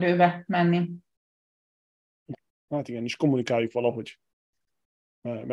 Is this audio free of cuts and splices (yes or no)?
yes